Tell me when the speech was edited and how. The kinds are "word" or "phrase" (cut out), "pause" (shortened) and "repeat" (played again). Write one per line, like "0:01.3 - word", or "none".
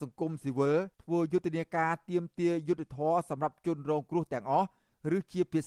0:00.9 - pause